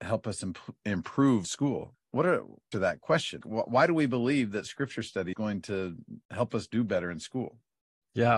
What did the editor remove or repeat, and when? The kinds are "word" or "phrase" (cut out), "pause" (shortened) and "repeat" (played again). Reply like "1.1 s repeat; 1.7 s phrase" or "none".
1.4 s word; 1.9 s word; 2.7 s phrase; 3.4 s word; 5.3 s word; 6.2 s pause